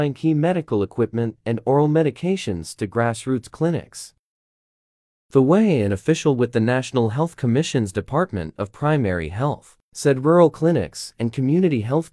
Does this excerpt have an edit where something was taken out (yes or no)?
no